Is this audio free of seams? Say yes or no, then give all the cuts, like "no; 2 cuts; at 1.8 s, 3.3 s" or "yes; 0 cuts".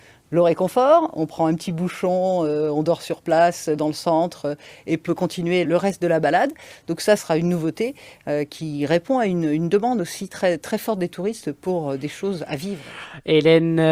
no; 3 cuts; at 5.1 s, 5.6 s, 7.2 s